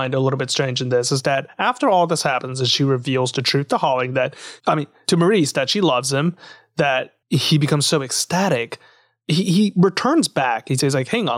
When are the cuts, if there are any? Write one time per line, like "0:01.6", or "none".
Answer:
0:07.2